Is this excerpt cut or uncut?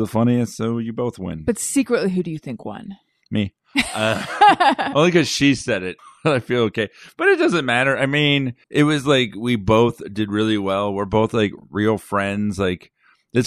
cut